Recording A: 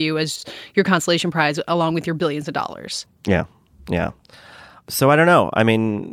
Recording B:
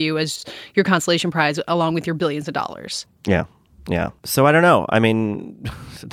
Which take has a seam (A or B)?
B